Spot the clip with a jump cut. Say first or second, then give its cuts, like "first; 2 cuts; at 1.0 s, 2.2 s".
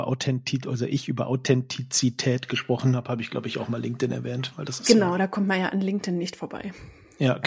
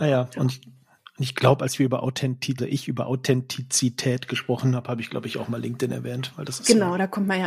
second; 1 cut; at 2.6 s